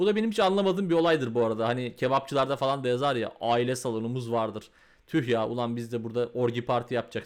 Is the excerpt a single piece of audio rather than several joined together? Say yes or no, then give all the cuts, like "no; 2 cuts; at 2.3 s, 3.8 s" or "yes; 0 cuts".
yes; 0 cuts